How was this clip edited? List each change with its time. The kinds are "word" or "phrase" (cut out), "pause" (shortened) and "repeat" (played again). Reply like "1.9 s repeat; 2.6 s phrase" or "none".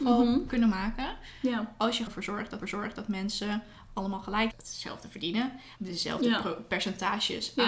2.1 s word; 2.6 s repeat; 4.5 s phrase; 5.8 s pause